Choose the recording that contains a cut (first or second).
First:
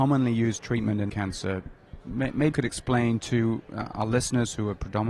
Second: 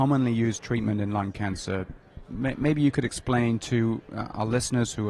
first